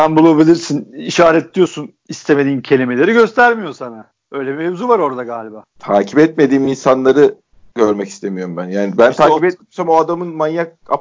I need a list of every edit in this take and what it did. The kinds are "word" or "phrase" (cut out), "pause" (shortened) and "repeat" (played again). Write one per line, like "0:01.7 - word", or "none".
none